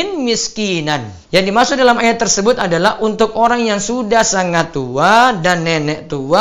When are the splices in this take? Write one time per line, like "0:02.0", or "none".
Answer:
0:01.2